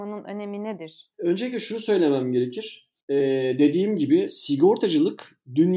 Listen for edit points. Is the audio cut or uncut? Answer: cut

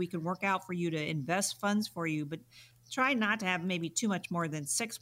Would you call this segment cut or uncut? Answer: uncut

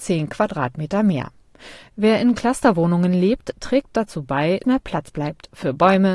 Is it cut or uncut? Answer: cut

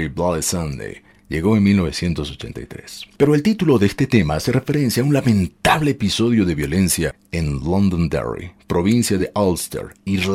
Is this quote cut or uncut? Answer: uncut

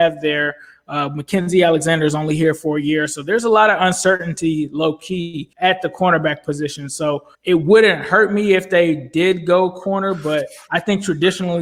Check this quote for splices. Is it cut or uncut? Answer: cut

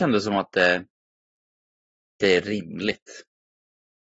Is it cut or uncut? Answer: uncut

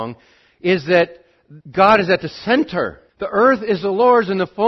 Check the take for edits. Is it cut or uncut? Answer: cut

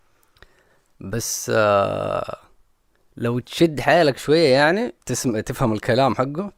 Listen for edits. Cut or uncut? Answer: cut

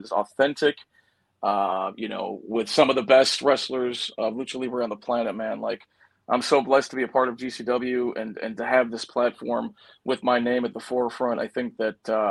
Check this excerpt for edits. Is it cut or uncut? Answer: uncut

